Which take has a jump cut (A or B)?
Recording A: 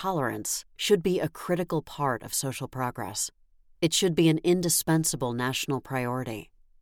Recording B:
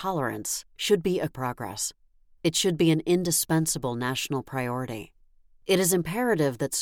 B